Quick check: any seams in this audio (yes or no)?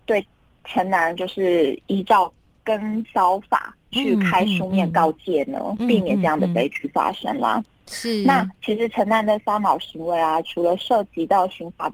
no